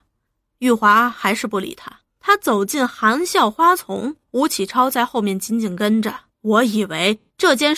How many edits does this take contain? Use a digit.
3